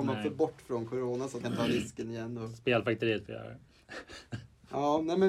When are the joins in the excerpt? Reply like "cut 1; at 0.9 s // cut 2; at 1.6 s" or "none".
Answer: cut 1; at 1.4 s